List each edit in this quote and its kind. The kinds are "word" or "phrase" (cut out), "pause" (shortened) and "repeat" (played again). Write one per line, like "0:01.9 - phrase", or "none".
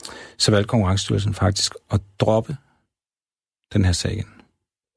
none